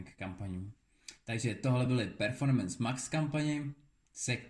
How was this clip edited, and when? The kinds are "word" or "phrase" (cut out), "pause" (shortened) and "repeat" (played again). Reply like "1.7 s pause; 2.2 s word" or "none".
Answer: none